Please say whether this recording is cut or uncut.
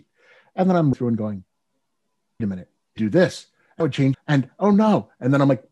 cut